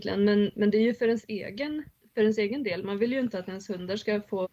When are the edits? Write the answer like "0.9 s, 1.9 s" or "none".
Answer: 1.9 s